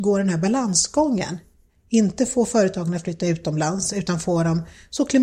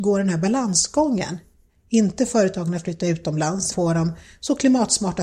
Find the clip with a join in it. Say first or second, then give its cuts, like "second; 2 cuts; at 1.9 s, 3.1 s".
second; 2 cuts; at 2.3 s, 3.7 s